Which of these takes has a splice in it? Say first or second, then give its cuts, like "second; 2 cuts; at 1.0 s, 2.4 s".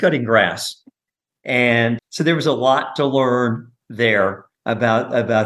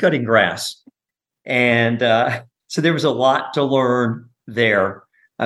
first; 2 cuts; at 2.0 s, 4.5 s